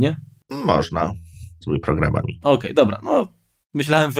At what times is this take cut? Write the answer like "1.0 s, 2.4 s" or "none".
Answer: 1.6 s